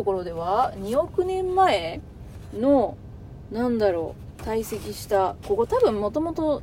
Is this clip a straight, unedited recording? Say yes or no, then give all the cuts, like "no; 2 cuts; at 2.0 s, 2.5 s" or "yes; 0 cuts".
no; 1 cut; at 5.4 s